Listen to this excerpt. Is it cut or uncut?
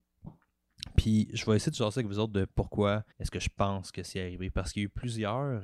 cut